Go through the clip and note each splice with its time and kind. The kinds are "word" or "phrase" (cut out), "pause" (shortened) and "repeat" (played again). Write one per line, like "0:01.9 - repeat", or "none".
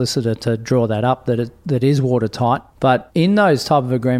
none

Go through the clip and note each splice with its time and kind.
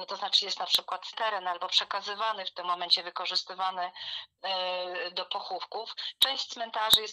0:01.1 - phrase

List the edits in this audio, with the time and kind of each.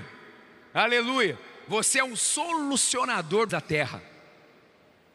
0:03.5 - phrase

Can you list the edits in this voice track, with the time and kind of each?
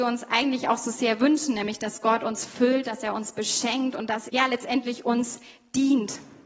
0:04.3 - word

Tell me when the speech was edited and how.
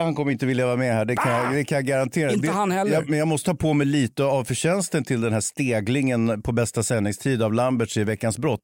0:03.4 - word

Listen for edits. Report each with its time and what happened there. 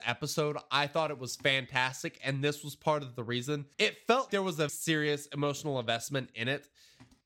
0:03.7 - pause
0:04.3 - word
0:04.7 - word

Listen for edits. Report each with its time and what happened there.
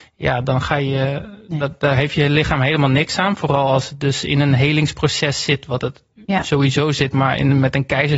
none

